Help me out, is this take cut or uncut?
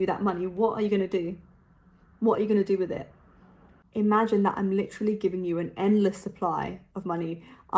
uncut